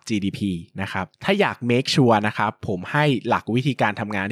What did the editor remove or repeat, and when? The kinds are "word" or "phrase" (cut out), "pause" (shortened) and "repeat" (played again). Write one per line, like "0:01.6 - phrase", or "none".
0:01.1 - pause